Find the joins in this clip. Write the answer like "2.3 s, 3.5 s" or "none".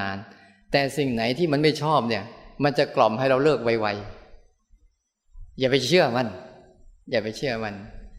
none